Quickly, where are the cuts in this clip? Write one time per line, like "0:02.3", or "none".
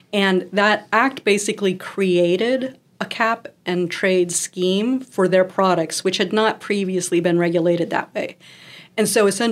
none